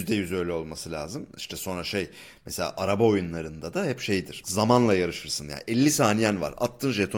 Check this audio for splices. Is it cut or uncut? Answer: uncut